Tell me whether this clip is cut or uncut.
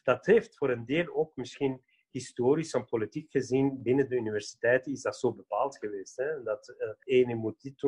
uncut